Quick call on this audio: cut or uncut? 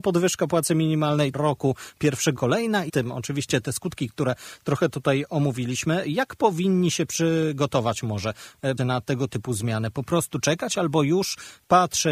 cut